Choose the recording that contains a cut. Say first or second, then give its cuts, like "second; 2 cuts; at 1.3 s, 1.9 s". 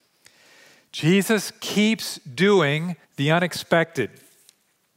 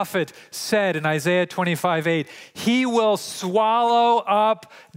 first; 1 cut; at 3.0 s